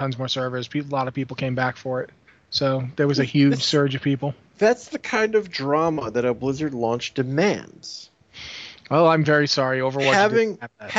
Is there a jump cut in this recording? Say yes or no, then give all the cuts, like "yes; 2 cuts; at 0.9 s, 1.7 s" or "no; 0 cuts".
no; 0 cuts